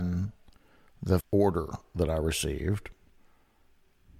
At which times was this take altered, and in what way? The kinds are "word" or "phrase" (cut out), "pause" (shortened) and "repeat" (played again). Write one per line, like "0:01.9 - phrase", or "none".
0:01.2 - word